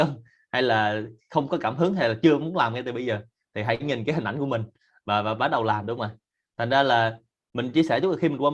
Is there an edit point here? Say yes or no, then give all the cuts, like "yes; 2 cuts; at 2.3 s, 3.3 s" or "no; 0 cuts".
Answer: no; 0 cuts